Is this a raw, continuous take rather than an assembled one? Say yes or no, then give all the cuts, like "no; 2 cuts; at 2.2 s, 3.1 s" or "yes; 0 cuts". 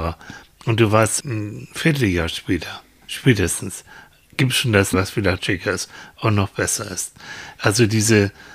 no; 4 cuts; at 1.2 s, 3.0 s, 4.9 s, 5.4 s